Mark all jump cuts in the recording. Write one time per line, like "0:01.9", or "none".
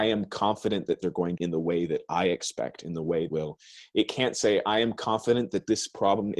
0:01.0
0:01.4
0:03.3